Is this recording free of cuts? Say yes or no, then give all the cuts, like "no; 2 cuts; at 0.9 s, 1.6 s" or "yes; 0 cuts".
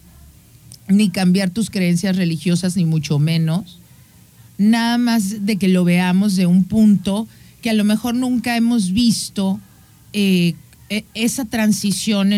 yes; 0 cuts